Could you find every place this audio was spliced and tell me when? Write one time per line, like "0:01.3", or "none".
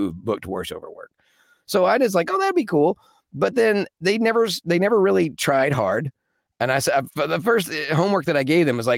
none